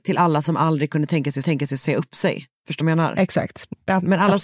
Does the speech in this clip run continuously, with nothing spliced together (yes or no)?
no